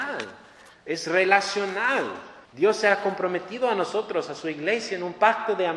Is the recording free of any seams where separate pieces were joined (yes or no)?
no